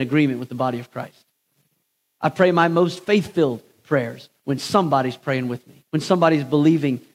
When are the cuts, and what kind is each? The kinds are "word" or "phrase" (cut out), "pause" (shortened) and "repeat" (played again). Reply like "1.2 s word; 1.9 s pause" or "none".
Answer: 5.9 s pause